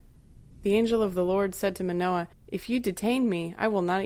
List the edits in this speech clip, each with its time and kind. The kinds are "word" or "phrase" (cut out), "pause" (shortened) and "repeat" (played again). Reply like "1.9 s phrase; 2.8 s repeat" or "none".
2.3 s pause